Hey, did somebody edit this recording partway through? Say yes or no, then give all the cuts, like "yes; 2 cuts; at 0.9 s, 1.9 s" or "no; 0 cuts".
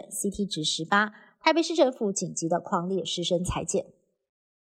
no; 0 cuts